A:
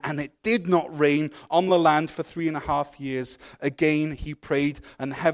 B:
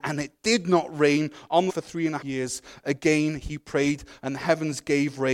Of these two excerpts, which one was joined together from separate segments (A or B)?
B